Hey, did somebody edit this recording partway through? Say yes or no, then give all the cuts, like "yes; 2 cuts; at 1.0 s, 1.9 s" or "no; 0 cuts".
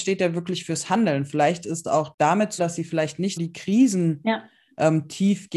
yes; 3 cuts; at 1.8 s, 2.6 s, 3.4 s